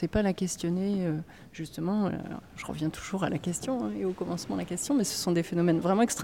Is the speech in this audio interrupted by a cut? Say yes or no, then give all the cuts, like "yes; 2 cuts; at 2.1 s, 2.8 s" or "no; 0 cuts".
no; 0 cuts